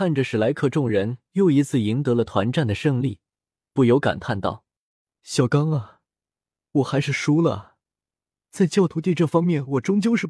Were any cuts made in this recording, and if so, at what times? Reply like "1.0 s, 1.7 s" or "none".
none